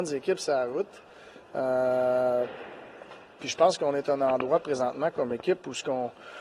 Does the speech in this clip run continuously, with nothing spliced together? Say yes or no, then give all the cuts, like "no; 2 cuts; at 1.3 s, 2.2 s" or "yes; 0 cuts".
yes; 0 cuts